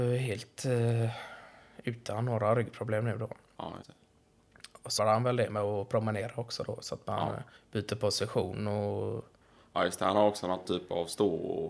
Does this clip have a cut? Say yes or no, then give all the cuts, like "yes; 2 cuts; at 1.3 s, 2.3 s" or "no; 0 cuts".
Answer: yes; 5 cuts; at 3.8 s, 5.0 s, 7.6 s, 9.4 s, 10.6 s